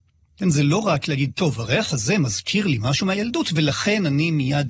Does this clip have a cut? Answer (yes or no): no